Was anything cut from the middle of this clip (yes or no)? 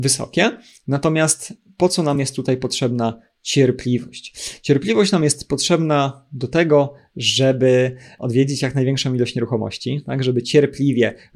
no